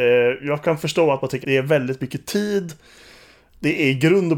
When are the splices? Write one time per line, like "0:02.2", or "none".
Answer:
0:01.4